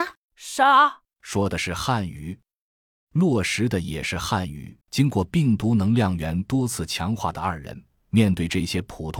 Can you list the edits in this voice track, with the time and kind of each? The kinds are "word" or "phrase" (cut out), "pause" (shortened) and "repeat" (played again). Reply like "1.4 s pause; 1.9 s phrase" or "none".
4.8 s pause